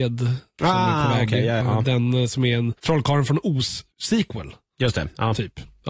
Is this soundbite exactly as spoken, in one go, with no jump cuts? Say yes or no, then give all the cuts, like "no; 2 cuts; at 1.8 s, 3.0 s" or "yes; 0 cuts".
no; 3 cuts; at 1.6 s, 2.8 s, 3.9 s